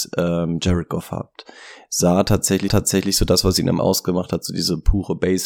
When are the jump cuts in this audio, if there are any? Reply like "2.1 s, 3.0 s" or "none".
2.7 s, 3.8 s